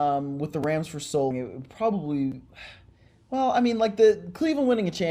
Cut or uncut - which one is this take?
cut